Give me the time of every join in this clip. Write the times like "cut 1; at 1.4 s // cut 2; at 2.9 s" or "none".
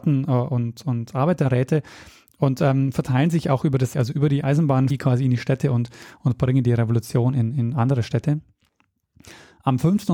cut 1; at 3.9 s // cut 2; at 4.9 s